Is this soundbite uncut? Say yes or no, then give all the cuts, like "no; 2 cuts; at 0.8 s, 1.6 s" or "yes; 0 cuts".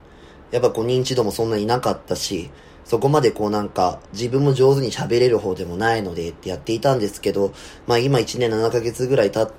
no; 1 cut; at 4.0 s